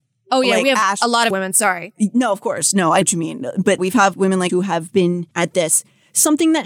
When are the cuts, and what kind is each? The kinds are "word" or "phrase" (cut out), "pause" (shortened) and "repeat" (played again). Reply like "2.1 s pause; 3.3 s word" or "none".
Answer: 1.3 s word; 3.0 s word; 3.8 s word; 4.1 s word; 4.5 s word; 5.3 s word